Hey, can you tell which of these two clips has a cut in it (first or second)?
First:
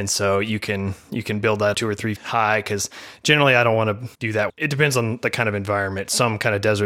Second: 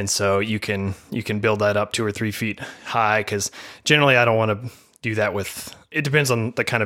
first